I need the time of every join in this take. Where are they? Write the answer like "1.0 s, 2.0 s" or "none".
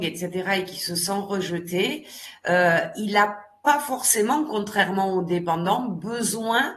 none

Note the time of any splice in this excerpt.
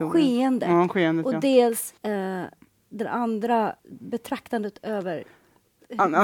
2.0 s, 3.8 s

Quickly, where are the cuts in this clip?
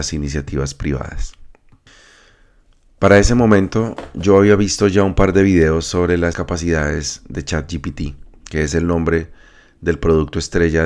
6.3 s

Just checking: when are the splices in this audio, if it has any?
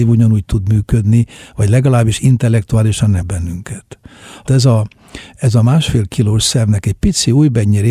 3.2 s, 4.5 s

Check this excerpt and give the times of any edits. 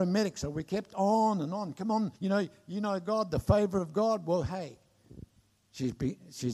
2.2 s

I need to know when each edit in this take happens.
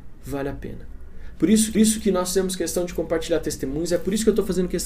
1.7 s

